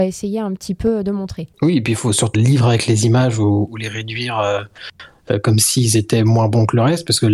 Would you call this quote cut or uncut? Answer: cut